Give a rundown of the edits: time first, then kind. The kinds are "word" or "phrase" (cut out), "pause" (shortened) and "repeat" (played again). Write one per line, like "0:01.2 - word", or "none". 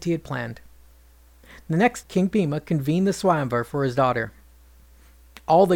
0:02.0 - word

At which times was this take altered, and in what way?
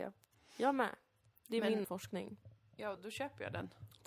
0:01.8 - word
0:03.0 - word

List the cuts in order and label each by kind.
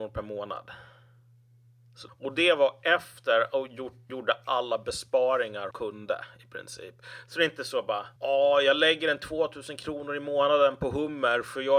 0:02.1 - word
0:04.1 - word
0:05.7 - word
0:08.2 - pause

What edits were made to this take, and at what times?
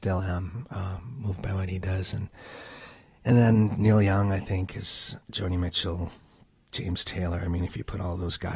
none

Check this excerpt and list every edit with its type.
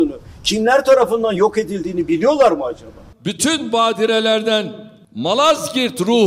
none

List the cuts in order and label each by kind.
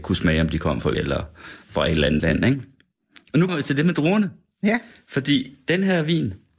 0:00.9 - word
0:02.2 - word
0:03.5 - word

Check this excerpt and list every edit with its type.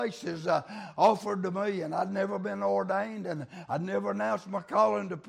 none

